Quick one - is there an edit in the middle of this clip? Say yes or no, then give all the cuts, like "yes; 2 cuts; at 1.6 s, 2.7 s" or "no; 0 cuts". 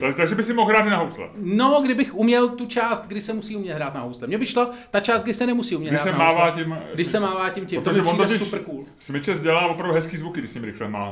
no; 0 cuts